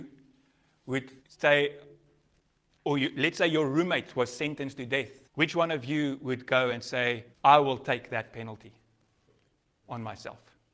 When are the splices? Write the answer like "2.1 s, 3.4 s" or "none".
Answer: 1.2 s, 5.2 s, 7.3 s